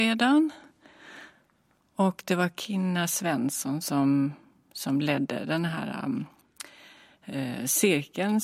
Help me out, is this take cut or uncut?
uncut